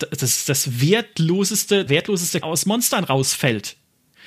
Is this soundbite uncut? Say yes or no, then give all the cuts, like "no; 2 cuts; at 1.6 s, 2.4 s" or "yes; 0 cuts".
no; 2 cuts; at 1.9 s, 2.4 s